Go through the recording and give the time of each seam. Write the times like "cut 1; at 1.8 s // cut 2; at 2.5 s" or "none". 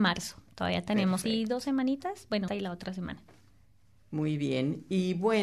cut 1; at 1.2 s // cut 2; at 2.5 s